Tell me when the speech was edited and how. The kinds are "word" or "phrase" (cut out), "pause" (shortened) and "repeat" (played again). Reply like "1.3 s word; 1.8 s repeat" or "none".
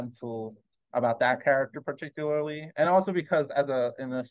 none